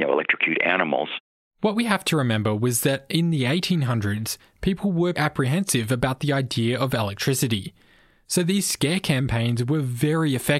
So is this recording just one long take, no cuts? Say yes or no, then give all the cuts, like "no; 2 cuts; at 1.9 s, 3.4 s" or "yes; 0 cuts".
no; 1 cut; at 5.2 s